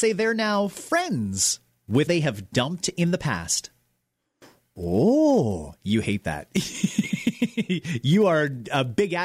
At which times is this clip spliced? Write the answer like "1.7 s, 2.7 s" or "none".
2.1 s